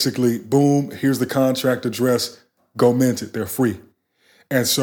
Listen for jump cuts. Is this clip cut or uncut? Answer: uncut